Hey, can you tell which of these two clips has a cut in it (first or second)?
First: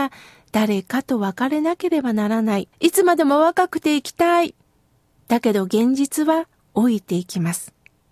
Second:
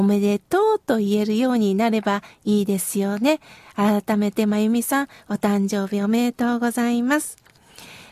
first